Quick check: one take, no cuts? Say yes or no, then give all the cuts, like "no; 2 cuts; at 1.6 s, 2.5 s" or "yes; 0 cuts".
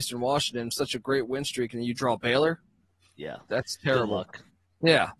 yes; 0 cuts